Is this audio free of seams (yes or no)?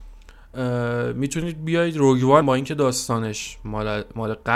no